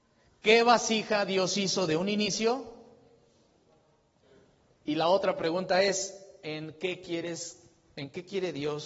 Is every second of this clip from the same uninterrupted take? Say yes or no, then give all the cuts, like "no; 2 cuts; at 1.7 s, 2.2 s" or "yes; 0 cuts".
yes; 0 cuts